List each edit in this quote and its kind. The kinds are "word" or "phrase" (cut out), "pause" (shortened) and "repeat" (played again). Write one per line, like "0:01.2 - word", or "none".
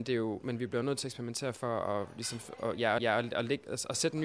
0:03.0 - repeat